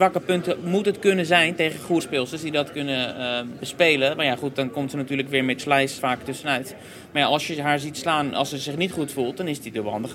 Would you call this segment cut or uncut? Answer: cut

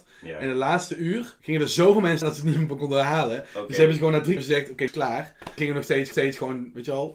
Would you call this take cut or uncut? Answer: cut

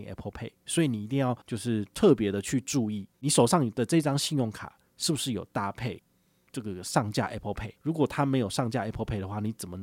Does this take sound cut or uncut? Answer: cut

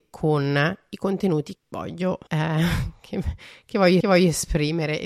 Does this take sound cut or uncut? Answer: cut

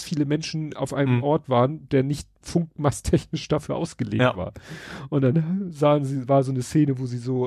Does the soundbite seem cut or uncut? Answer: cut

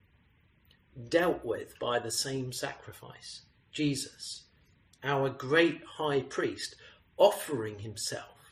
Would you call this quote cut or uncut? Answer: uncut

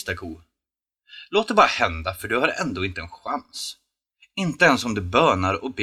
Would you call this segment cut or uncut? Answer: uncut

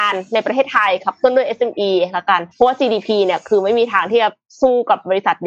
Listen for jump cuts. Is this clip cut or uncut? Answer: cut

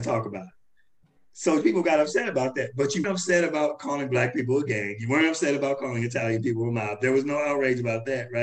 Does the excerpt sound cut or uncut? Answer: cut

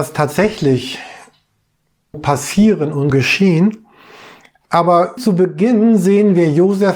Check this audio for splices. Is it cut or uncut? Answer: cut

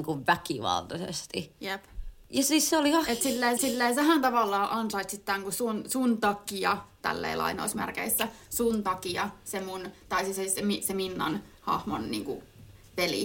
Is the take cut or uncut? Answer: cut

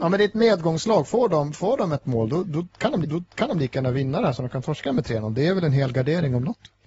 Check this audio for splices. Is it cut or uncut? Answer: cut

